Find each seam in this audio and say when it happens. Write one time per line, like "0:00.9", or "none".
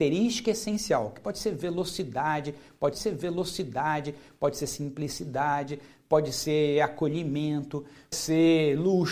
0:02.9
0:08.1